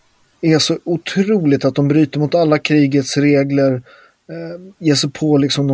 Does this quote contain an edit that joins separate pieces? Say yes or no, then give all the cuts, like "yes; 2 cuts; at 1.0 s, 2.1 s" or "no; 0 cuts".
no; 0 cuts